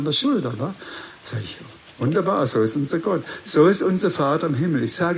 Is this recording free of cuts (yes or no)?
yes